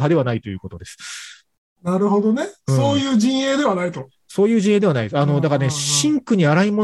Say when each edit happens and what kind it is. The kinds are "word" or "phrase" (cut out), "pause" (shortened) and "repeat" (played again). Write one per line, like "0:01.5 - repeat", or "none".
none